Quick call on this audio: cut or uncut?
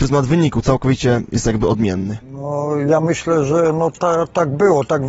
cut